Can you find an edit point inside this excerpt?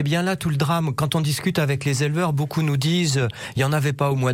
no; 0 cuts

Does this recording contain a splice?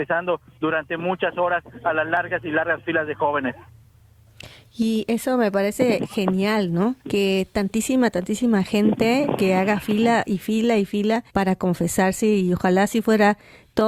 yes; 2 cuts; at 7.0 s, 11.3 s

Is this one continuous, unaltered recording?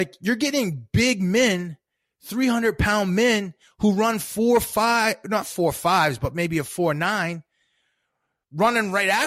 yes; 0 cuts

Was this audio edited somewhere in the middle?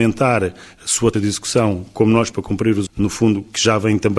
yes; 3 cuts; at 1.1 s, 2.3 s, 2.9 s

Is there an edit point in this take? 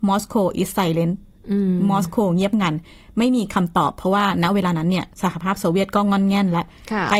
yes; 1 cut; at 5.1 s

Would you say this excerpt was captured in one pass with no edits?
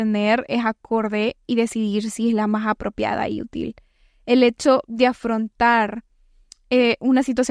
yes; 0 cuts

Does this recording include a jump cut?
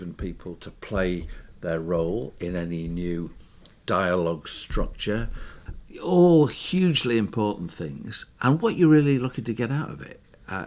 no; 0 cuts

